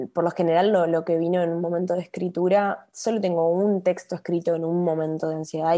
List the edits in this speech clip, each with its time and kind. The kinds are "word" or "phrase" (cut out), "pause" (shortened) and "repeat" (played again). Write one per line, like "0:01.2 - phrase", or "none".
none

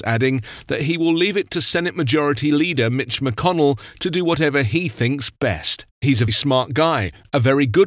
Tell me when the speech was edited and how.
0:05.9 - pause
0:06.3 - word

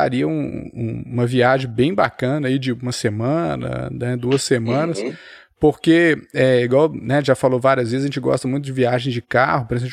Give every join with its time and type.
none

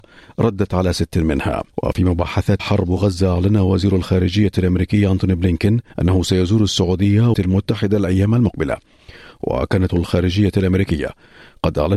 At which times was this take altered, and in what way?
0:01.7 - pause
0:02.6 - word
0:05.9 - pause
0:07.3 - phrase
0:09.9 - phrase

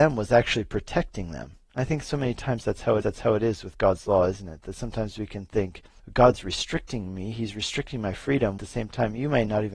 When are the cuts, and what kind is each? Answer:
0:03.0 - repeat
0:06.0 - pause
0:08.6 - phrase

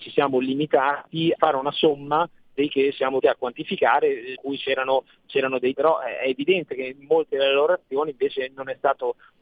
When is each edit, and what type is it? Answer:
0:01.3 - word
0:02.7 - word
0:03.2 - word
0:04.4 - word
0:05.7 - word

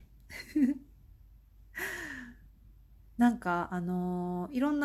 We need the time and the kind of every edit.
none

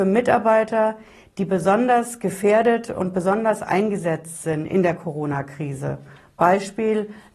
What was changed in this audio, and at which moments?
none

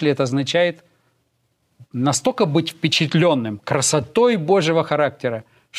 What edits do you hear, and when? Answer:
none

